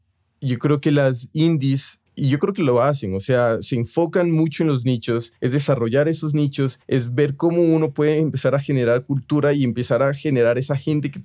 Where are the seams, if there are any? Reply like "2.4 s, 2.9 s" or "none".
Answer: 2.1 s, 5.4 s, 6.8 s